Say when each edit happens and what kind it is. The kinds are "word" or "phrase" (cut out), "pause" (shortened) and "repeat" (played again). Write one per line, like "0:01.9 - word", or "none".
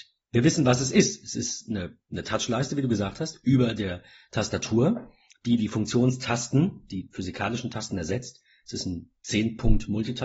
none